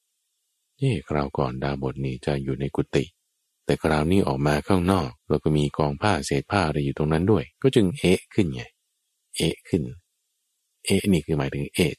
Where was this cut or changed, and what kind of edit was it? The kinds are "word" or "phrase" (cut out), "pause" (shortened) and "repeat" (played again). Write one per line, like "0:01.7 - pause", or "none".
0:05.2 - pause
0:07.5 - pause